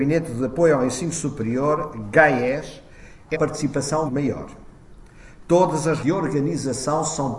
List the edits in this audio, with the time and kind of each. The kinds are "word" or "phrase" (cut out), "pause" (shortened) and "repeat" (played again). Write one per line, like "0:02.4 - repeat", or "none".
0:03.3 - word
0:04.1 - word
0:06.0 - word